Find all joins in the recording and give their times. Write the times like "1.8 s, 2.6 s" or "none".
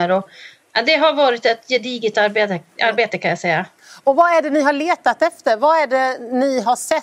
none